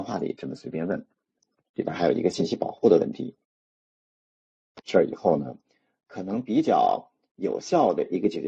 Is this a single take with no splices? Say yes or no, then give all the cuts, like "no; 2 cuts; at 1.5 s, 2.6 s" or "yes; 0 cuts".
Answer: yes; 0 cuts